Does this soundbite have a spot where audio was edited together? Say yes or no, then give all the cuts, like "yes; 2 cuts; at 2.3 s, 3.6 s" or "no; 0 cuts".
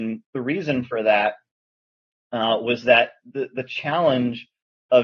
no; 0 cuts